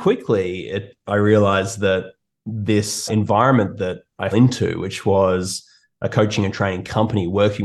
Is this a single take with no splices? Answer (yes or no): no